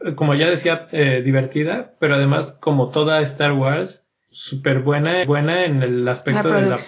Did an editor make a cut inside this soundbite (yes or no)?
yes